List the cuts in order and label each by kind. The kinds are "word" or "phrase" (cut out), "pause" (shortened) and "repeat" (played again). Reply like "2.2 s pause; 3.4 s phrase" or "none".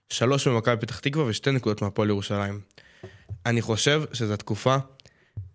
none